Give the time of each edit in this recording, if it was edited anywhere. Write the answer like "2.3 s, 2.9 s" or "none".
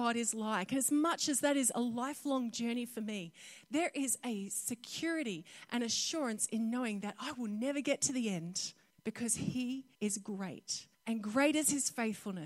8.9 s, 9.9 s, 10.9 s